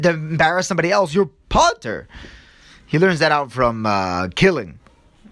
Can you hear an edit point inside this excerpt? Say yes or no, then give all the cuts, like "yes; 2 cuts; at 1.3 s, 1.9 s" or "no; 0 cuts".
no; 0 cuts